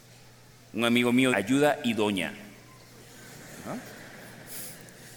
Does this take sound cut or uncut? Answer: cut